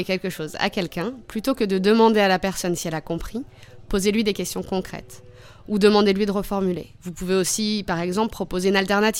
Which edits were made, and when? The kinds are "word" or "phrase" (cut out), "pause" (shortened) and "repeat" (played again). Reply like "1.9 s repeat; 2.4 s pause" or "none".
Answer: 7.0 s pause